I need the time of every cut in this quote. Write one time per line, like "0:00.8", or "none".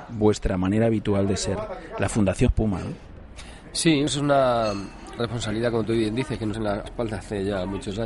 0:02.5
0:04.1
0:05.2
0:06.5
0:06.9